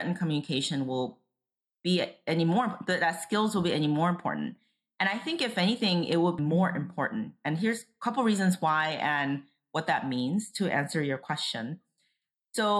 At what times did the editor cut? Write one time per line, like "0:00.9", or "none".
0:06.4